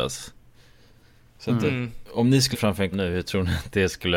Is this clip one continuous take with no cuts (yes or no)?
no